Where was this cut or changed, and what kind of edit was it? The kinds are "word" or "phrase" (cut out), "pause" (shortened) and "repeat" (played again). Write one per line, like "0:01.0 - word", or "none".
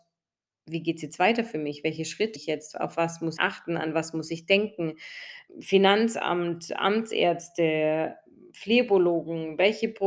0:02.4 - word
0:03.4 - word
0:05.5 - pause